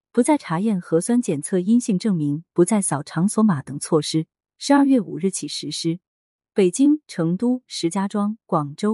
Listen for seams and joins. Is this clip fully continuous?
yes; 0 cuts

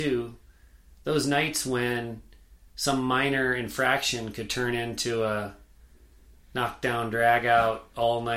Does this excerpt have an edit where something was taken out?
no; 0 cuts

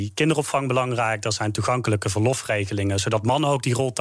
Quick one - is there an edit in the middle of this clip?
no; 0 cuts

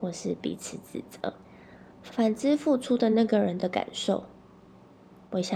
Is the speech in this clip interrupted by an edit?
yes; 1 cut; at 1.9 s

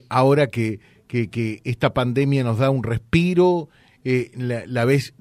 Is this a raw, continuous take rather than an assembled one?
yes; 0 cuts

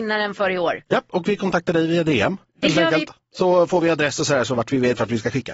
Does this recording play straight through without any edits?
yes; 0 cuts

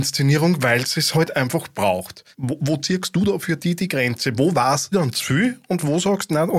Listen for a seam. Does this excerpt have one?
yes; 2 cuts; at 2.3 s, 4.9 s

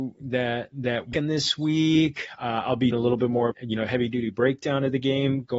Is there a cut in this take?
yes; 3 cuts; at 1.1 s, 2.9 s, 3.5 s

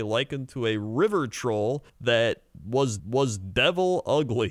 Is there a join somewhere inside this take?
yes; 2 cuts; at 1.9 s, 3.0 s

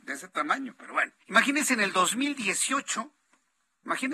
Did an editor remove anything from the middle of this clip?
yes; 1 cut; at 1.2 s

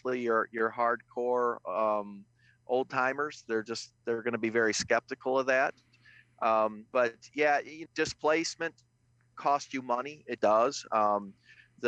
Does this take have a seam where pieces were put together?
yes; 3 cuts; at 6.9 s, 7.9 s, 10.4 s

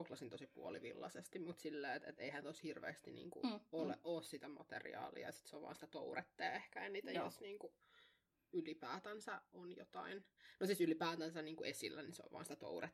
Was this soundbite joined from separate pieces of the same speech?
no; 0 cuts

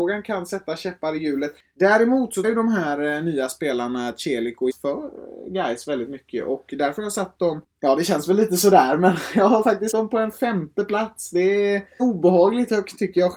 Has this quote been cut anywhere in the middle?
yes; 4 cuts; at 2.4 s, 4.7 s, 9.9 s, 12.0 s

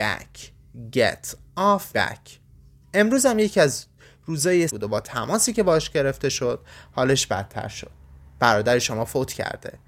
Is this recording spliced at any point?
yes; 2 cuts; at 1.9 s, 4.7 s

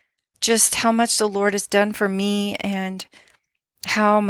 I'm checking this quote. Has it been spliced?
no; 0 cuts

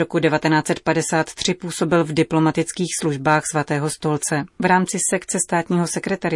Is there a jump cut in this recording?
yes; 1 cut; at 4.5 s

